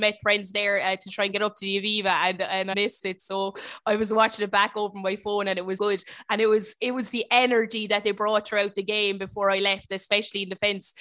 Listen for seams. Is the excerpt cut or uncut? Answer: cut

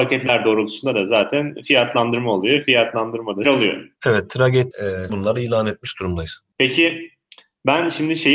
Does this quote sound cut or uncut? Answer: cut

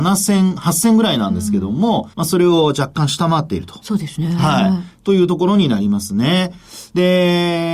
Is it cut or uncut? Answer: cut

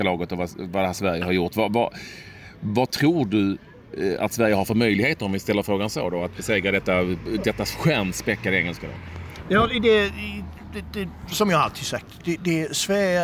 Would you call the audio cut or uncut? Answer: uncut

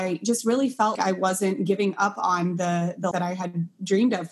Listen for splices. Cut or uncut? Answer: cut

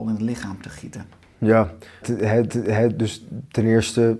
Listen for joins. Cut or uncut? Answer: cut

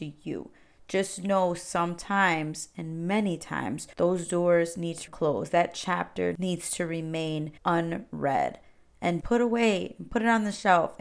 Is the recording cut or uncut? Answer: cut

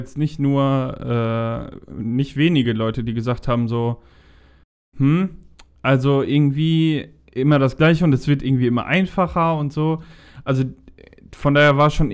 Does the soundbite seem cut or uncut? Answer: uncut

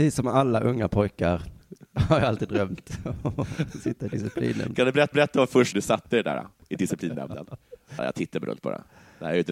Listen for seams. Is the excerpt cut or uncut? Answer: cut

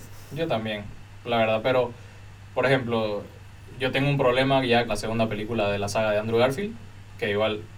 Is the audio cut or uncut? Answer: cut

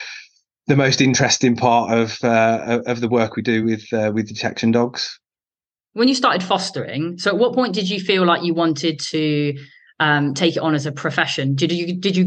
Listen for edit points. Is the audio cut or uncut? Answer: uncut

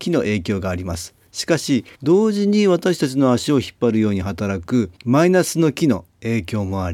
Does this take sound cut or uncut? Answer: cut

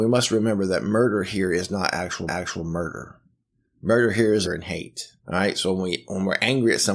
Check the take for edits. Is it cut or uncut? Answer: cut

